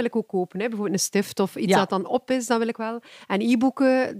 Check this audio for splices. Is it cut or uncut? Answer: uncut